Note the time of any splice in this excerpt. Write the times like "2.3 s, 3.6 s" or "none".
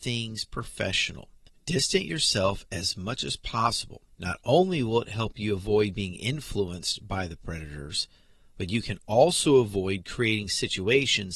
4.1 s